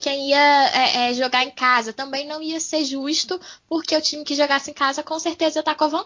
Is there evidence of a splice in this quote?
no; 0 cuts

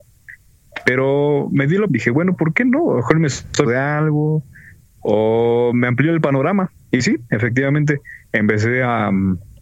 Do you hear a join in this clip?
yes; 3 cuts; at 1.9 s, 3.6 s, 8.2 s

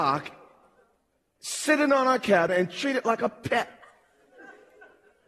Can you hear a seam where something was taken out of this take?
no; 0 cuts

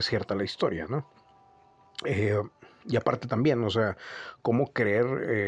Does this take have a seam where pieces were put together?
no; 0 cuts

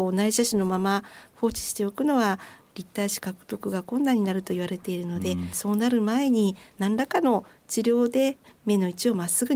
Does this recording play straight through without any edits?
yes; 0 cuts

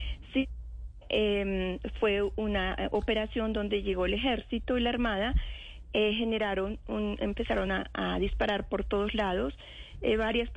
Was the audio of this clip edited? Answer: no; 0 cuts

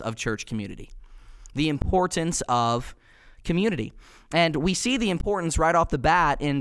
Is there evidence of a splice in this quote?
no; 0 cuts

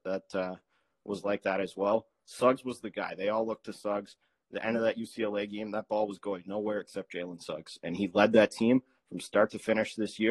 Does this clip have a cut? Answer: no; 0 cuts

